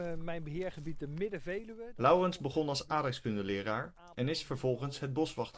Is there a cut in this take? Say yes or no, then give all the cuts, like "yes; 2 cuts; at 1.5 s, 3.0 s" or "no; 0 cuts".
no; 0 cuts